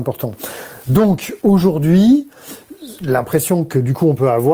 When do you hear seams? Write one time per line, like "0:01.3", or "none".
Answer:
0:01.4